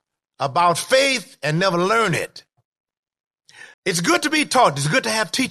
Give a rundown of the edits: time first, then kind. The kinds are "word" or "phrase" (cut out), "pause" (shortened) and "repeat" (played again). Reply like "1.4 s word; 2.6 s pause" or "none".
3.7 s pause